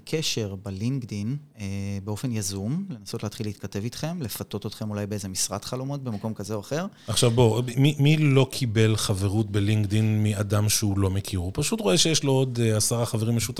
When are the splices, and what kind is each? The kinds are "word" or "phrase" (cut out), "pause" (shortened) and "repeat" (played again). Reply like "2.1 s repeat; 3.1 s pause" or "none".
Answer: none